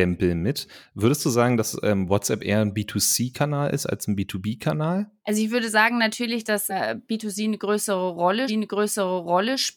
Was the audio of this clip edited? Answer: yes; 3 cuts; at 5.2 s, 6.7 s, 8.5 s

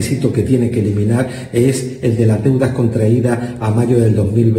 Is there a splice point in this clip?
no; 0 cuts

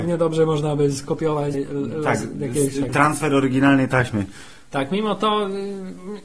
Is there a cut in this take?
yes; 2 cuts; at 1.5 s, 2.9 s

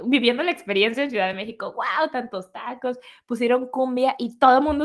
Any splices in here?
no; 0 cuts

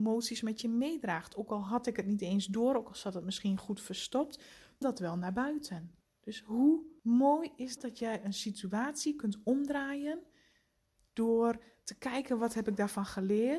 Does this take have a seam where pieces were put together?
yes; 2 cuts; at 4.8 s, 7.8 s

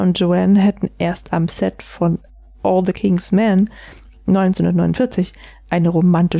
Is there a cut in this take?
no; 0 cuts

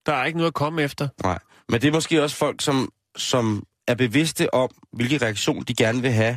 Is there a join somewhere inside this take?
no; 0 cuts

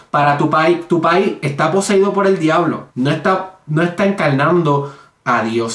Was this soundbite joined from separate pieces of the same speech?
yes; 1 cut; at 2.9 s

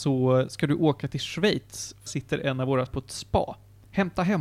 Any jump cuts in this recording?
yes; 2 cuts; at 2.1 s, 2.9 s

